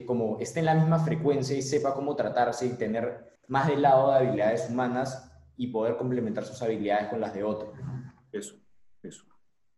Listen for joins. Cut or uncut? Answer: uncut